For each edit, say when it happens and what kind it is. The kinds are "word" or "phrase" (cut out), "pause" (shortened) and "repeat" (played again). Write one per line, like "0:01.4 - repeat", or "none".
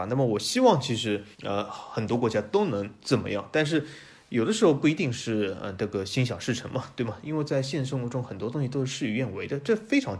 0:01.3 - pause